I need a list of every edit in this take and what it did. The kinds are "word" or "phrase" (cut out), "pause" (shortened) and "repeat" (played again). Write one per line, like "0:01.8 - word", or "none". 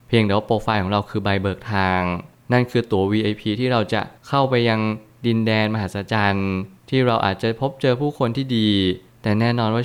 none